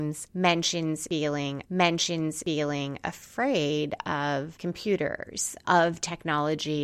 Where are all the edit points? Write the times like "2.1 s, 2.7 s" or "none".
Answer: 1.6 s